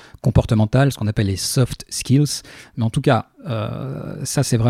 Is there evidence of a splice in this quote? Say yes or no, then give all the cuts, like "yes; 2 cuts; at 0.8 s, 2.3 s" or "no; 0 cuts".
no; 0 cuts